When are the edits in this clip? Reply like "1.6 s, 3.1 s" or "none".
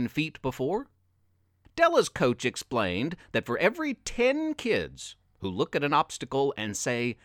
none